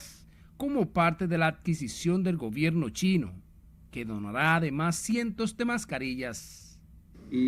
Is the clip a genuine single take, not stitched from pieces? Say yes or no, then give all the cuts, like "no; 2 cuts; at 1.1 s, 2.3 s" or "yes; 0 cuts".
yes; 0 cuts